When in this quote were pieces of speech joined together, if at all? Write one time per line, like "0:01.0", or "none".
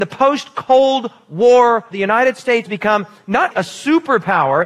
0:01.9
0:02.6
0:03.5

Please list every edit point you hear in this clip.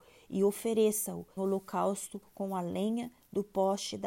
0:01.4

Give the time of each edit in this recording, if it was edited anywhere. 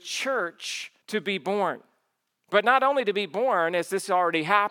0:01.0

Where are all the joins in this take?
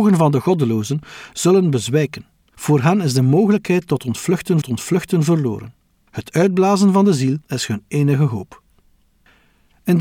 0:04.6
0:07.4

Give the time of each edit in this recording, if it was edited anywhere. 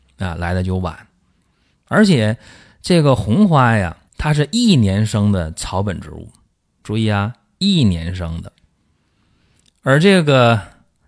0:04.1

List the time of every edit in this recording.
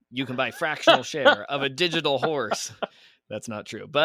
none

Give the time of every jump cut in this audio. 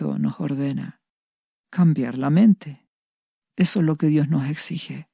none

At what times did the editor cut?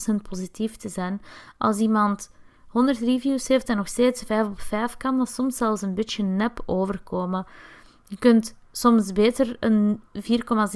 none

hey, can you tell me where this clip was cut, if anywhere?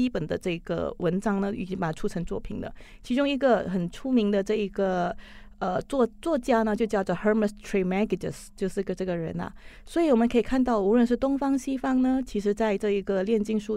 none

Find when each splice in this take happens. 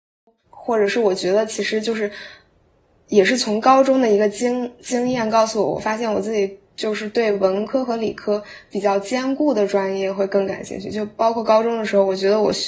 none

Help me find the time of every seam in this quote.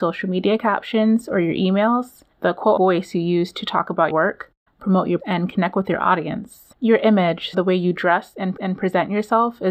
0:02.3
0:02.8
0:04.1
0:05.2
0:06.7
0:07.5
0:08.6

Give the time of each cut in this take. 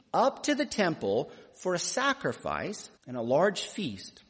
0:03.0

